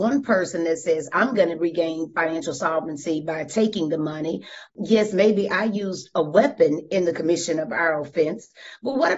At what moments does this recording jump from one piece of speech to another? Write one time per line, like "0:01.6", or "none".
0:04.7